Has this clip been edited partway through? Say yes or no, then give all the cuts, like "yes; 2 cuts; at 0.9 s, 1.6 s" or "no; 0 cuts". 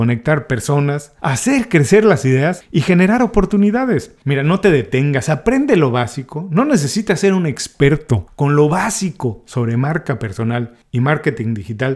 no; 0 cuts